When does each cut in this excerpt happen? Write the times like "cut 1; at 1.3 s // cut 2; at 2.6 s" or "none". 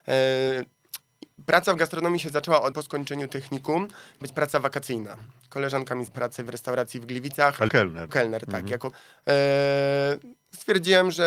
cut 1; at 2.7 s // cut 2; at 4.2 s // cut 3; at 6.1 s // cut 4; at 6.5 s // cut 5; at 7.7 s // cut 6; at 8.1 s // cut 7; at 8.9 s